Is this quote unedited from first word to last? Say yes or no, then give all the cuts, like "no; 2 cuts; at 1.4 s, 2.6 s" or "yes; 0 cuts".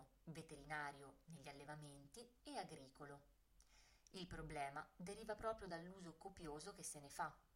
yes; 0 cuts